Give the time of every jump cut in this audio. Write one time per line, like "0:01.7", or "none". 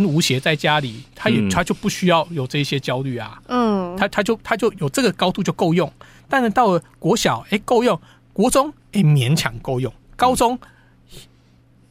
none